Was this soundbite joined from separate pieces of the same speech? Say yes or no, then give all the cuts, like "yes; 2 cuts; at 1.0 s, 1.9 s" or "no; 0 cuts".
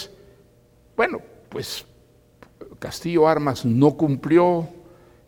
no; 0 cuts